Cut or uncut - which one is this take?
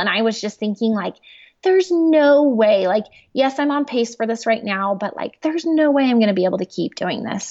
uncut